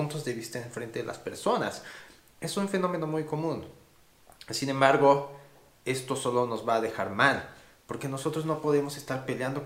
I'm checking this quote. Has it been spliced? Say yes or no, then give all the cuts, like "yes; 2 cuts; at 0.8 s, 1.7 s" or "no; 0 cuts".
no; 0 cuts